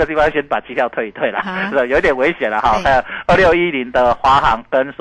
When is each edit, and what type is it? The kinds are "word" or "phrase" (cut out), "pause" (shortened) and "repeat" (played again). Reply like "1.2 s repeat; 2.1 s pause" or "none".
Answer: 1.4 s word